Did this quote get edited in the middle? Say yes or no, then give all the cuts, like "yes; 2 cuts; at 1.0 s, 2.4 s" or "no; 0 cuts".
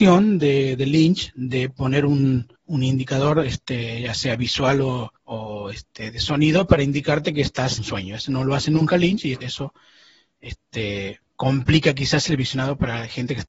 yes; 5 cuts; at 2.6 s, 5.2 s, 7.8 s, 9.4 s, 11.3 s